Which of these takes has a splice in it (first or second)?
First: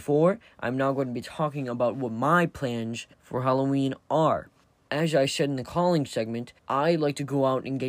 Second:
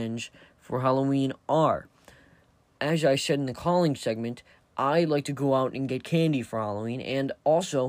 first